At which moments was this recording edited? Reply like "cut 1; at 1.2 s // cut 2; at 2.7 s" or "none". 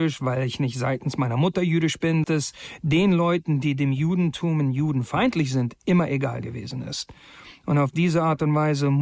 cut 1; at 2.2 s